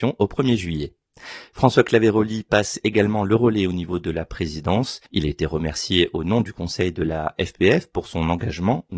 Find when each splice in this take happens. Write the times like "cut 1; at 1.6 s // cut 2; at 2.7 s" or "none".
cut 1; at 5.1 s